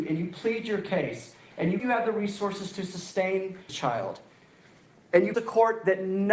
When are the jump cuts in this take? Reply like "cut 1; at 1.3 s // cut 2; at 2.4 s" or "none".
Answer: cut 1; at 1.8 s // cut 2; at 3.7 s // cut 3; at 5.3 s